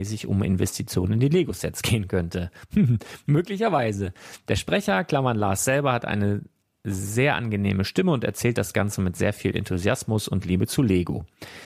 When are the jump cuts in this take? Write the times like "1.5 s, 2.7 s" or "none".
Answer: none